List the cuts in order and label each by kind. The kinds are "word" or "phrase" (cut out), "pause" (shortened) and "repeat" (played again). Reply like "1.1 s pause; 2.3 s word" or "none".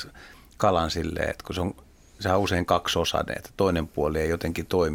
none